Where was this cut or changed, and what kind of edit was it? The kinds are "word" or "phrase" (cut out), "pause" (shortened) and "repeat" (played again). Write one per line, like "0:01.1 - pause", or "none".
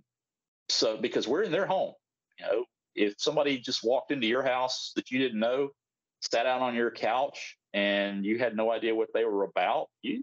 none